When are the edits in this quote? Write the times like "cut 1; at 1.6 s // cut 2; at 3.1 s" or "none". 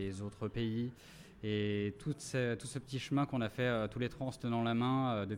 none